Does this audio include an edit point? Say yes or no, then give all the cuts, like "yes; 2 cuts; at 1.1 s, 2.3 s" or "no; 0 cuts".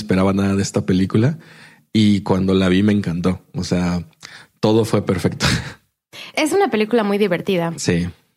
no; 0 cuts